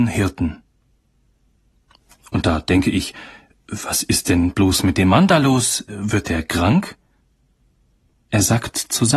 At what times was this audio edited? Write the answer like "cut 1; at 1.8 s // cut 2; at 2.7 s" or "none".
none